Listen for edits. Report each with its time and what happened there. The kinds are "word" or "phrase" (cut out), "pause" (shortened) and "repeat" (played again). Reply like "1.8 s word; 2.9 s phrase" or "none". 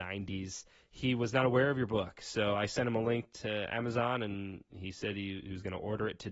none